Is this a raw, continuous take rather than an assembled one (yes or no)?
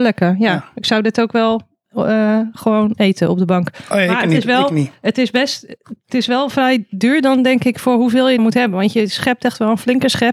no